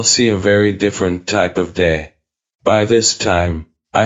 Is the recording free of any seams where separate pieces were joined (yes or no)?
yes